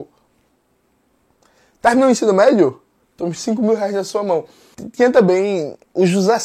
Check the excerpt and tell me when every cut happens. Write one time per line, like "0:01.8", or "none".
none